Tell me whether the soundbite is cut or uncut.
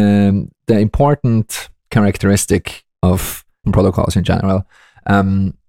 cut